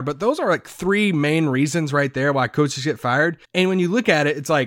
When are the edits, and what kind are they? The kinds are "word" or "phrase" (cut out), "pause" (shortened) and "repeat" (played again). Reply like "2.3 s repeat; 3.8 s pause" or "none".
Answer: 3.4 s pause